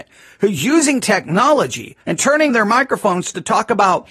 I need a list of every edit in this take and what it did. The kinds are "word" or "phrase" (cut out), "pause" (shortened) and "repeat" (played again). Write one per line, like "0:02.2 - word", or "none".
0:02.0 - pause
0:02.5 - word